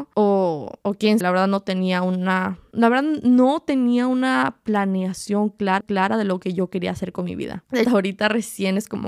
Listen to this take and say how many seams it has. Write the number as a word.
three